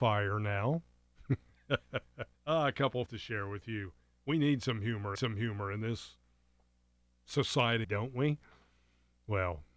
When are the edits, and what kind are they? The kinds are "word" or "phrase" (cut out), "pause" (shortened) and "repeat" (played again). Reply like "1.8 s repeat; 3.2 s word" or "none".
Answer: 2.3 s pause; 3.1 s word; 5.2 s repeat; 7.8 s phrase